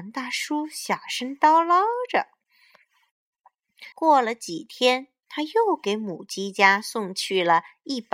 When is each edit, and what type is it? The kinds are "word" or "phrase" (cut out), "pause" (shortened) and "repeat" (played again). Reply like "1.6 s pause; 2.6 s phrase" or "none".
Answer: 3.9 s pause